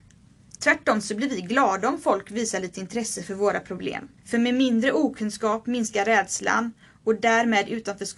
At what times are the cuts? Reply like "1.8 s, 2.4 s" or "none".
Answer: 4.2 s